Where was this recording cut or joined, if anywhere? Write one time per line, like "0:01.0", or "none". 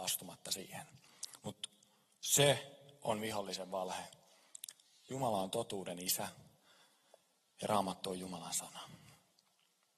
none